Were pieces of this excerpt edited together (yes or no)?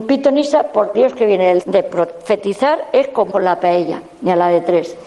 yes